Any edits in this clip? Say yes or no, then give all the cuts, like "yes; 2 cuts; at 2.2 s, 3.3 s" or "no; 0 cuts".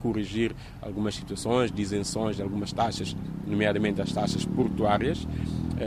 no; 0 cuts